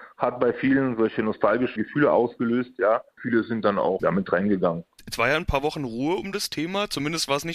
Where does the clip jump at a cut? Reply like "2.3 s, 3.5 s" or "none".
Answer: 1.8 s, 3.1 s, 4.0 s